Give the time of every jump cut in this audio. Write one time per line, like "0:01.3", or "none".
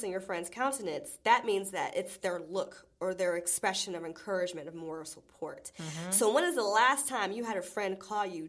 none

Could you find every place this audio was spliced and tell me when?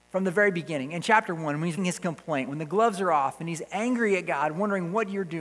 0:01.8

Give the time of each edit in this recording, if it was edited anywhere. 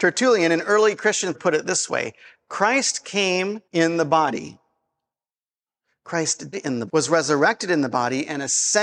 0:01.3
0:03.7
0:06.5
0:06.9

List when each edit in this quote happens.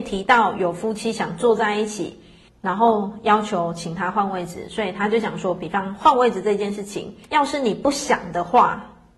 0:02.5
0:07.2

